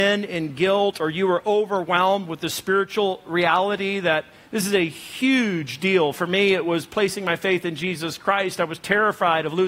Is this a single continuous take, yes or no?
yes